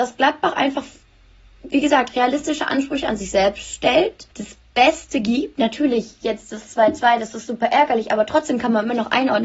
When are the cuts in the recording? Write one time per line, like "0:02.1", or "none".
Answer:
0:04.3